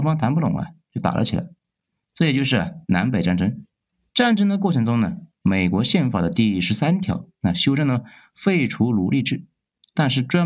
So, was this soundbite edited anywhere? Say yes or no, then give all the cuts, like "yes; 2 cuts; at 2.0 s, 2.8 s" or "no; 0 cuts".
yes; 1 cut; at 3.9 s